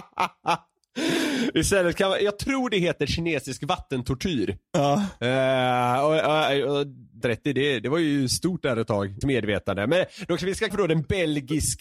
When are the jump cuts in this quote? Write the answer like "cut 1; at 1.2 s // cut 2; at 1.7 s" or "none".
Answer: cut 1; at 2.2 s // cut 2; at 7.2 s // cut 3; at 9.2 s // cut 4; at 10.4 s // cut 5; at 10.7 s